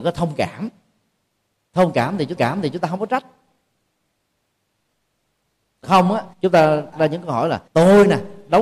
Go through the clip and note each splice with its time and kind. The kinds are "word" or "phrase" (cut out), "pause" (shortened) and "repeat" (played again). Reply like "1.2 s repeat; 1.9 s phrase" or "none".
2.4 s repeat; 5.8 s word; 6.3 s pause; 6.9 s word; 7.7 s pause